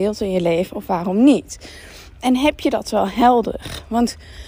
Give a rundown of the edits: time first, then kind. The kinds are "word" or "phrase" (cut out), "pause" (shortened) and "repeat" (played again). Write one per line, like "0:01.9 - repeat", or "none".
none